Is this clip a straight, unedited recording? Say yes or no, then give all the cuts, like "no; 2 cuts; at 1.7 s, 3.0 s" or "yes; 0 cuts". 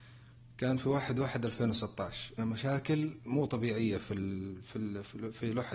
no; 1 cut; at 2.4 s